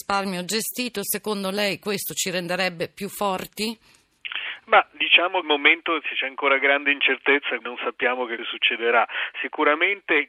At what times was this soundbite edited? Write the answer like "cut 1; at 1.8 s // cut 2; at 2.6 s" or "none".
cut 1; at 5.4 s // cut 2; at 7.6 s // cut 3; at 8.4 s